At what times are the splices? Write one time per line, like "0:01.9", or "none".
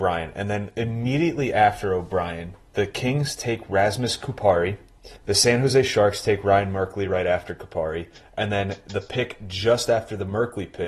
0:05.2

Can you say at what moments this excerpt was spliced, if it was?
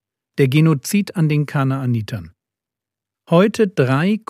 none

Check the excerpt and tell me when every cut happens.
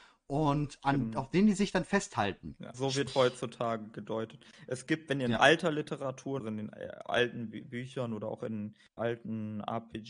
0:02.7
0:03.1
0:06.4
0:09.0

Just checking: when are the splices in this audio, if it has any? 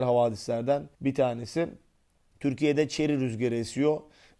0:00.9

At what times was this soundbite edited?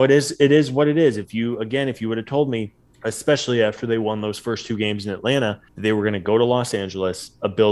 0:02.9
0:05.7

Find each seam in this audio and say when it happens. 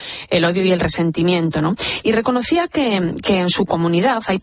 none

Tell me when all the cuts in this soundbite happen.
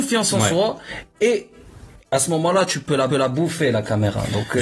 0:03.1

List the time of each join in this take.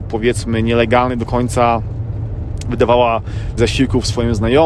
0:03.6

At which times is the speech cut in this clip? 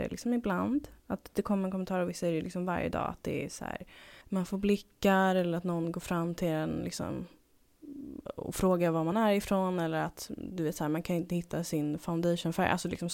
0:01.0
0:04.2

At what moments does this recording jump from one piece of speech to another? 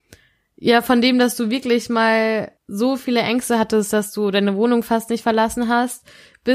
0:02.6

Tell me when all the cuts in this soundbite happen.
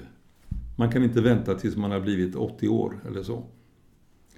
none

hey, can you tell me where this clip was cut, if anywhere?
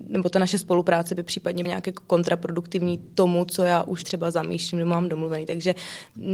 0:01.6
0:04.0

